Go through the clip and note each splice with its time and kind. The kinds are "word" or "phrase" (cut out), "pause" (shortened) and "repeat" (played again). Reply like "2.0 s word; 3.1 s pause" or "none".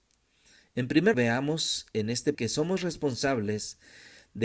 1.1 s word; 2.3 s word